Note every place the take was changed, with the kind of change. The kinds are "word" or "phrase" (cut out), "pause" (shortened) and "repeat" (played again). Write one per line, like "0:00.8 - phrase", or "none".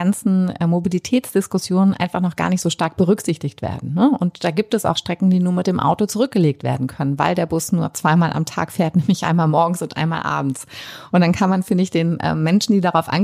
0:05.0 - word